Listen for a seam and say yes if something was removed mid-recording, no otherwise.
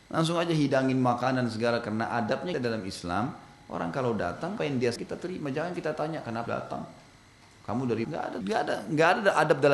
yes